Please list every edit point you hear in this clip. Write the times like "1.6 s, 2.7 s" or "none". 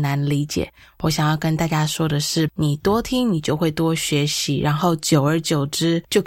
2.5 s